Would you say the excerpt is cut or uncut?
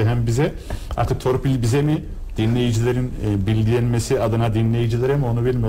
uncut